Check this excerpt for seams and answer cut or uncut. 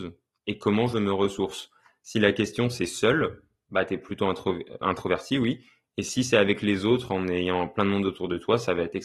cut